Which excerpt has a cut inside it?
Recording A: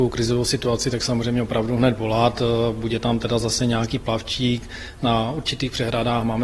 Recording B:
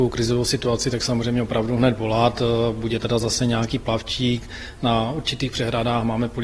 B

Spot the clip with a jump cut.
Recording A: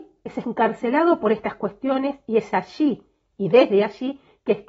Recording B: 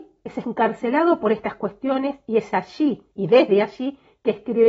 B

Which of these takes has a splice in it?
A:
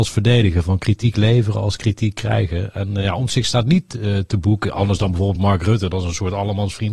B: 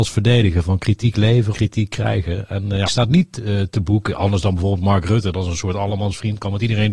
B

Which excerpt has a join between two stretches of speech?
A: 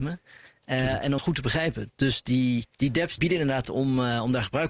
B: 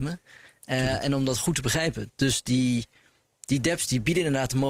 A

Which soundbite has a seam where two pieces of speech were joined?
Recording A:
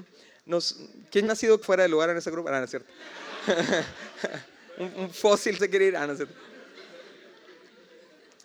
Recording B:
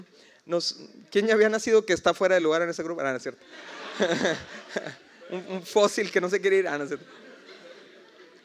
A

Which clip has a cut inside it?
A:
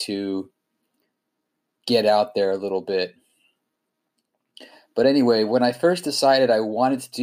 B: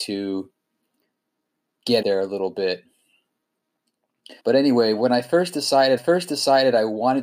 B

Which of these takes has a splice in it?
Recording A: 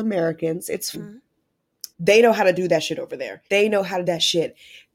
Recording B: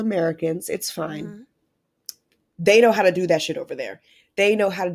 A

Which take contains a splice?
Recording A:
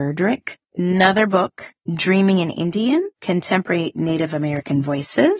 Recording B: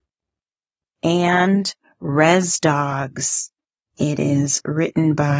A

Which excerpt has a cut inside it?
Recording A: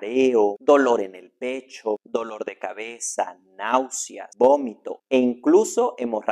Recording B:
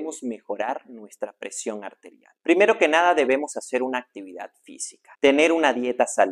B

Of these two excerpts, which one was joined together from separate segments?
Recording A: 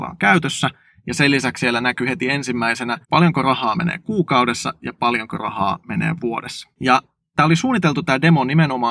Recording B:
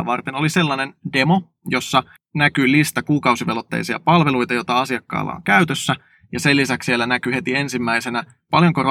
A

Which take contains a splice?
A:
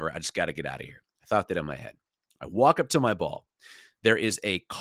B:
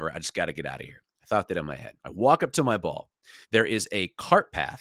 B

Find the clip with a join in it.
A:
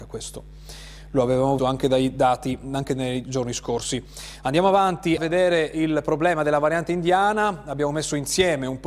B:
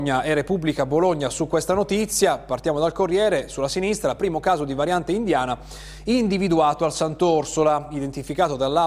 A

